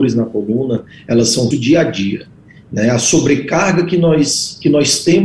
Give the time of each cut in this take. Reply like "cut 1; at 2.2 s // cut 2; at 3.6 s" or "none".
cut 1; at 1.5 s